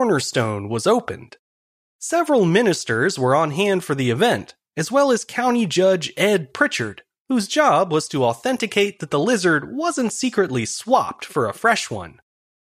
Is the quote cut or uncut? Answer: uncut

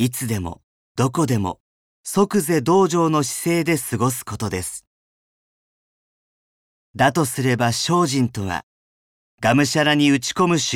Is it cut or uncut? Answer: cut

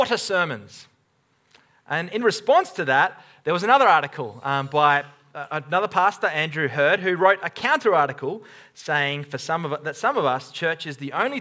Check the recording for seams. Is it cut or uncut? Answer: uncut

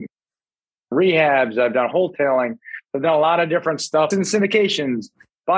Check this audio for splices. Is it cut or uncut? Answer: cut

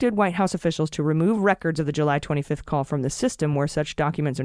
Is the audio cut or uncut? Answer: uncut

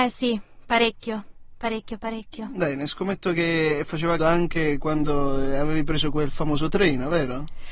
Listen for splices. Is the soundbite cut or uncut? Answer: cut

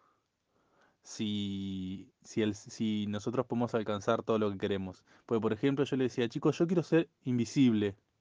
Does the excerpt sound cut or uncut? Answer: uncut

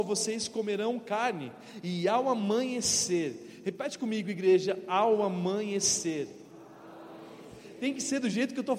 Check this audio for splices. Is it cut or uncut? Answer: uncut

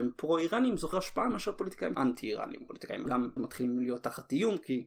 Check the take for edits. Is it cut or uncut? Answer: cut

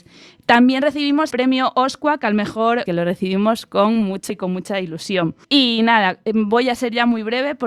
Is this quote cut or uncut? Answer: cut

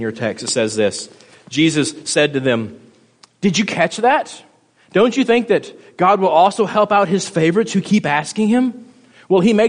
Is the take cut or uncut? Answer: uncut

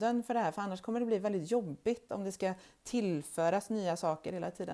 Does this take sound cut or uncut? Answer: uncut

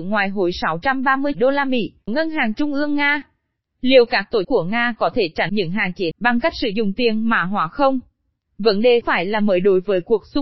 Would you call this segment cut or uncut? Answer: cut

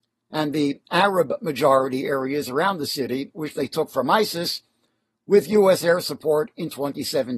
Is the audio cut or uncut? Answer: uncut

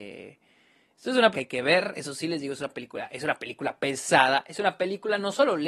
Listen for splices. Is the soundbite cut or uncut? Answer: cut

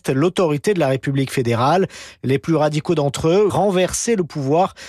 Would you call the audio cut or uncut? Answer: cut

